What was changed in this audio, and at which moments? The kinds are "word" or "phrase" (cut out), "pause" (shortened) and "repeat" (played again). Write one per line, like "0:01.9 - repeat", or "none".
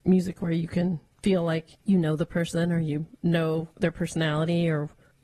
0:01.7 - pause
0:03.7 - pause